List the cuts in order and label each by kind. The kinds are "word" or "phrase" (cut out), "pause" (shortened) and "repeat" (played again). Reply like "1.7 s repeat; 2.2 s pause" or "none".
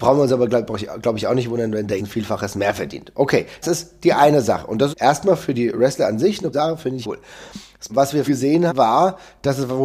2.0 s word; 3.6 s word; 4.9 s word; 6.5 s word; 7.0 s word; 7.9 s word; 8.3 s word; 8.7 s word